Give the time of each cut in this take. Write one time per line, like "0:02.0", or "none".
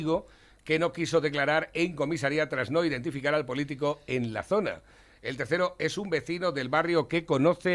none